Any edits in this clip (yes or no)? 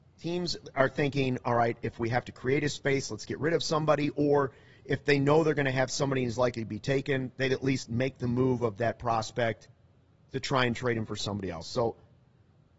no